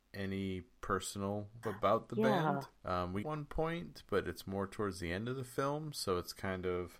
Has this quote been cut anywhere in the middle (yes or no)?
yes